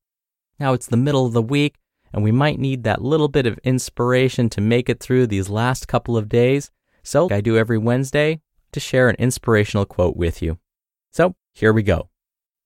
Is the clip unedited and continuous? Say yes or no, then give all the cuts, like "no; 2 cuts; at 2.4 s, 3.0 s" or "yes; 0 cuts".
no; 2 cuts; at 7.3 s, 8.7 s